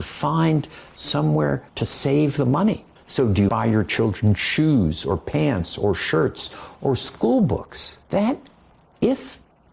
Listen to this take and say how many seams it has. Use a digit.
4